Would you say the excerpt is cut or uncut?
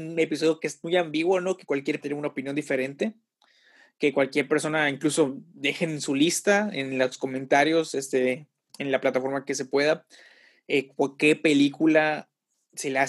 cut